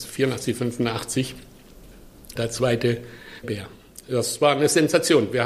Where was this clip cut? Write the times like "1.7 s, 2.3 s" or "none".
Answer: 2.4 s, 3.4 s